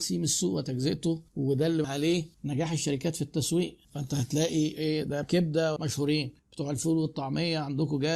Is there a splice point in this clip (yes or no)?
yes